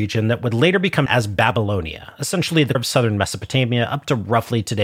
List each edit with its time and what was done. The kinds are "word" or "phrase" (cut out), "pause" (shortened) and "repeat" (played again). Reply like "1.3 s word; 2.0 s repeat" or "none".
1.1 s word; 2.7 s word